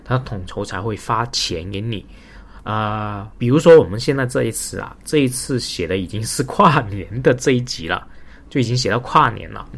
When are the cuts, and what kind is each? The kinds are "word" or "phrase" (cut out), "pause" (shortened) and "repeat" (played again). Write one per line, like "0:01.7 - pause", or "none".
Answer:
0:03.3 - word